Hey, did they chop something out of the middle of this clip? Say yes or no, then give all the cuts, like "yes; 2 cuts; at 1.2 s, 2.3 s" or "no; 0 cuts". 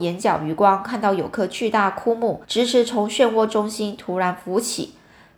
yes; 1 cut; at 2.4 s